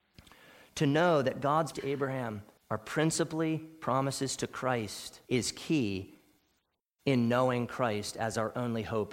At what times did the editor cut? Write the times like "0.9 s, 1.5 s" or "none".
1.7 s, 2.6 s, 5.2 s